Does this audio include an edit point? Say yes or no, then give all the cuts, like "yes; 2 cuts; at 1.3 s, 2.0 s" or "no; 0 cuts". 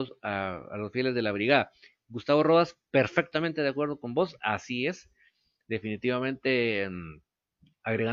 no; 0 cuts